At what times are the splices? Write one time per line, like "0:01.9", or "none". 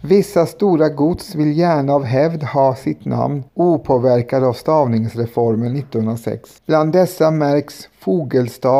0:03.5
0:06.6